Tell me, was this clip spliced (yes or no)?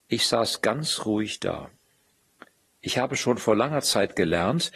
no